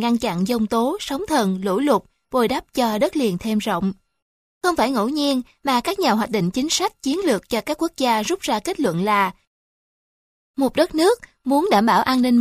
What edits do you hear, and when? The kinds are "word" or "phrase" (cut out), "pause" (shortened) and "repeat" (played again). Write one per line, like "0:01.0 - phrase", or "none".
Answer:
none